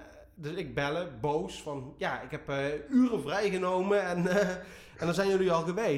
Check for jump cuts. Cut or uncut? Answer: uncut